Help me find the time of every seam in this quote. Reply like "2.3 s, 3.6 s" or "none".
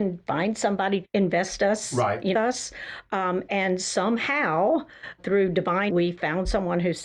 1.0 s, 2.3 s, 5.2 s, 5.9 s